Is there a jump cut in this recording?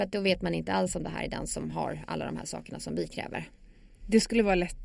no; 0 cuts

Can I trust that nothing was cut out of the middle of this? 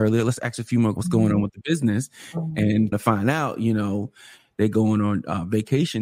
no; 2 cuts; at 1.0 s, 2.9 s

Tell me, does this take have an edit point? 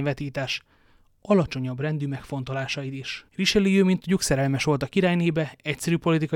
yes; 1 cut; at 3.3 s

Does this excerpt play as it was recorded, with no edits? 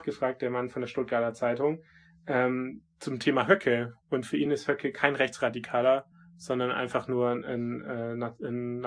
yes; 0 cuts

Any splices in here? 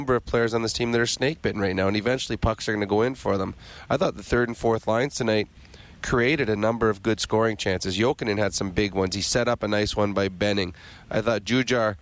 no; 0 cuts

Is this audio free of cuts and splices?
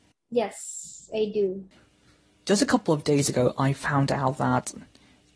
yes; 0 cuts

